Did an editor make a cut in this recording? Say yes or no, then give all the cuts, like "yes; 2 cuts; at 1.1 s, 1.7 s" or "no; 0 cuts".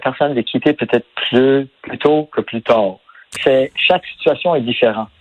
yes; 2 cuts; at 1.8 s, 3.4 s